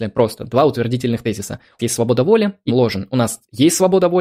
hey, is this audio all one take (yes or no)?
no